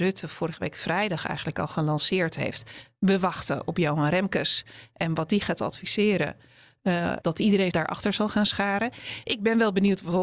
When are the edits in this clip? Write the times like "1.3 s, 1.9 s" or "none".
7.2 s, 7.7 s